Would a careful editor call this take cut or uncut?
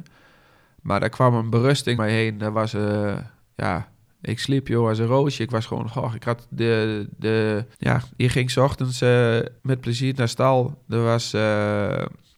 cut